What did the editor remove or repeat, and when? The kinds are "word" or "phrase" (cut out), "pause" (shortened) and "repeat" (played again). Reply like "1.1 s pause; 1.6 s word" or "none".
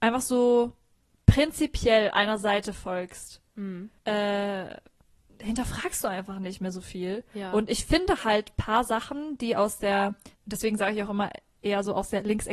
4.0 s pause; 10.3 s pause